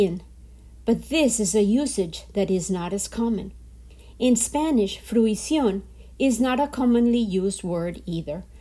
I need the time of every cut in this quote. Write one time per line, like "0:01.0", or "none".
none